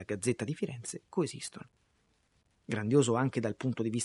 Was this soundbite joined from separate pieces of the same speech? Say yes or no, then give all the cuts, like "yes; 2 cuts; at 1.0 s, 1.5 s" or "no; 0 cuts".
no; 0 cuts